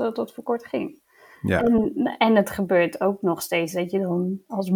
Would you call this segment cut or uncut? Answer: uncut